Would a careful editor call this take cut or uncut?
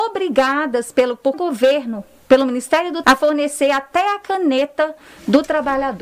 cut